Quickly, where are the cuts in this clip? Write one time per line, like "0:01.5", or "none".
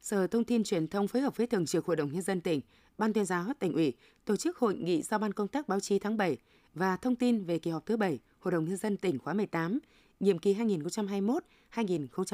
none